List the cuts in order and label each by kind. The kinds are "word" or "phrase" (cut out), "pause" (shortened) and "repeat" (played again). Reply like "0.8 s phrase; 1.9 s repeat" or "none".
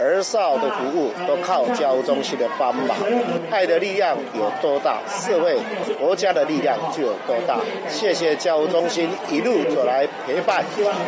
none

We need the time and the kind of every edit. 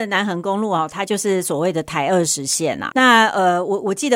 2.9 s word

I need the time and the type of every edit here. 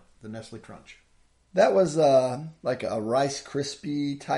none

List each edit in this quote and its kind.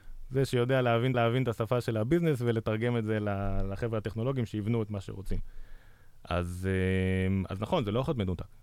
1.1 s repeat

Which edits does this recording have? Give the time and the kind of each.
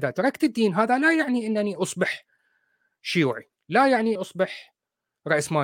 4.1 s word

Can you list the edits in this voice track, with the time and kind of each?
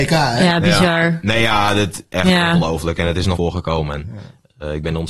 3.3 s word

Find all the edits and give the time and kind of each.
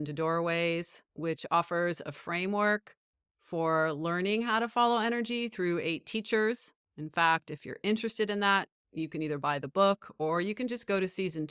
1.1 s pause

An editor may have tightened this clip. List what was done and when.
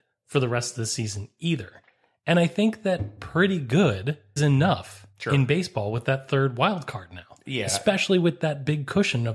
4.4 s word

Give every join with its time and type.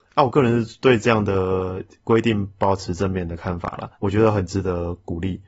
3.9 s pause

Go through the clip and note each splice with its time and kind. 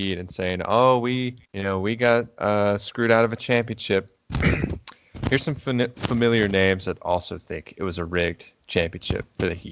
1.4 s pause

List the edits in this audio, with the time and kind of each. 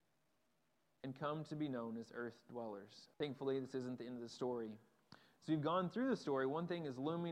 3.1 s pause

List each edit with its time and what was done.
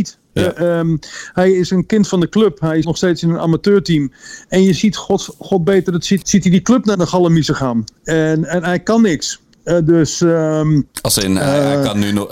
2.8 s word; 4.8 s word; 6.2 s word; 6.9 s word; 10.9 s pause

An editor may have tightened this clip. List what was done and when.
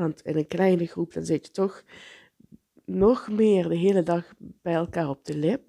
none

